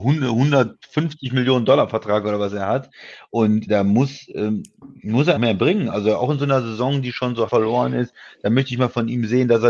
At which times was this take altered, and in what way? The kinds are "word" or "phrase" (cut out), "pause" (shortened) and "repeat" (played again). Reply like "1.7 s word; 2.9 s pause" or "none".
3.7 s word; 5.4 s word; 7.5 s word